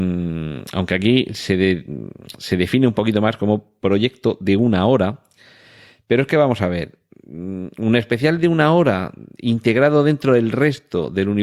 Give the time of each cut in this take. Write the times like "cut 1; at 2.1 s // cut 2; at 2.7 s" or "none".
none